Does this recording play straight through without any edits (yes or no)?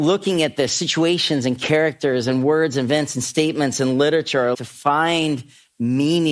no